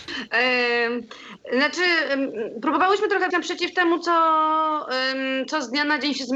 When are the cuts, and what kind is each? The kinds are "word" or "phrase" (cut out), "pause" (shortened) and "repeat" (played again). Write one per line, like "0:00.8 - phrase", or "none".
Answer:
0:03.3 - word